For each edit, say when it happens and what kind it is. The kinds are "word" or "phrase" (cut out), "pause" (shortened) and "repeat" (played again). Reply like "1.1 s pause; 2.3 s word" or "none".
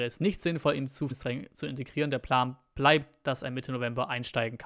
1.1 s word